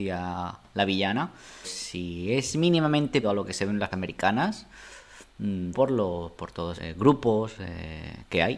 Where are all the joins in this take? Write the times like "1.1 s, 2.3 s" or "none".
1.6 s, 3.2 s, 3.9 s, 5.7 s, 6.8 s